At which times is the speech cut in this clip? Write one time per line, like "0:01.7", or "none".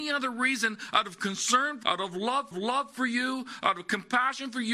0:01.8
0:02.5